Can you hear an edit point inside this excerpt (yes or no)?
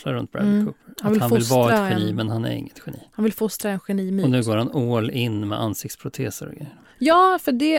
no